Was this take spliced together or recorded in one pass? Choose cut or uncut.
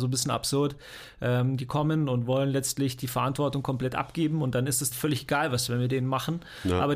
cut